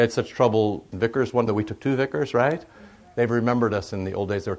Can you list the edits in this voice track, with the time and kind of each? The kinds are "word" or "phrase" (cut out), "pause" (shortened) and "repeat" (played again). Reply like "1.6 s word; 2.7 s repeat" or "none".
0.9 s word; 1.5 s word